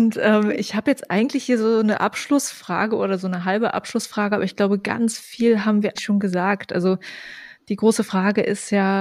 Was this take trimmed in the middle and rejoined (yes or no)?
yes